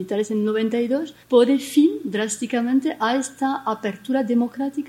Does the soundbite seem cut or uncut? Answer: cut